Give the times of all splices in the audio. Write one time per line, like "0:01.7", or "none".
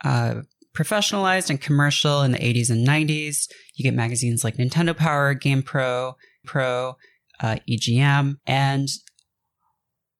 0:06.4
0:08.4

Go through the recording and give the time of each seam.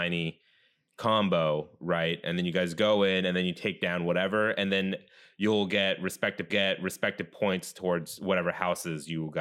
0:06.5

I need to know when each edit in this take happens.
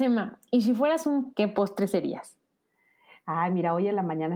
0:01.3

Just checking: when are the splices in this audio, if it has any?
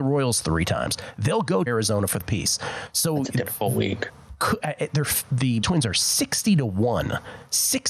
0:01.7
0:02.2
0:05.6

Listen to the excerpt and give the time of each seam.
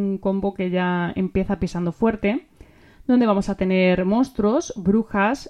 none

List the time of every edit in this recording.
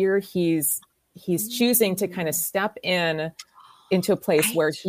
none

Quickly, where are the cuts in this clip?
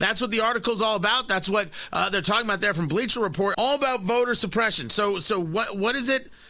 0:03.5

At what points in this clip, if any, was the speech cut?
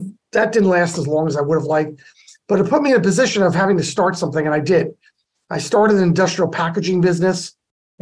none

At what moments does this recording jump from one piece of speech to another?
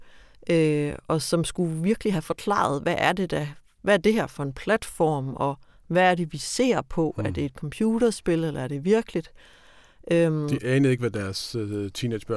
none

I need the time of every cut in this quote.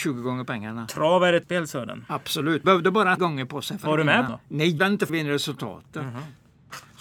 0:01.4
0:02.6
0:03.2
0:04.3
0:04.8
0:05.1

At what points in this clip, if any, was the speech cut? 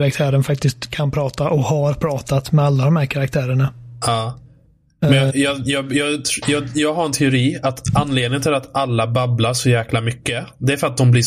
0:05.3

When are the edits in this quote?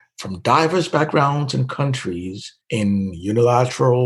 0:02.6

